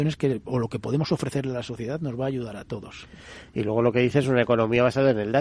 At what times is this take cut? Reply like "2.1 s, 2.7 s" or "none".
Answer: none